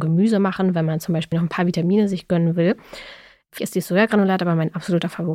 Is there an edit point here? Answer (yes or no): yes